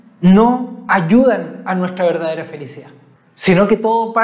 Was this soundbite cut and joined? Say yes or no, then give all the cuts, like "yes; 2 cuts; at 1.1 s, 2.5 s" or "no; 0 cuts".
yes; 1 cut; at 3.2 s